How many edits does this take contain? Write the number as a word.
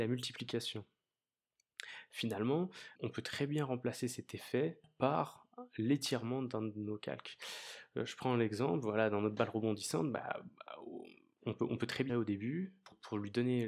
two